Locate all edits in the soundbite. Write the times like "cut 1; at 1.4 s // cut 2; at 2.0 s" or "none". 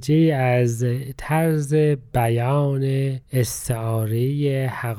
cut 1; at 3.2 s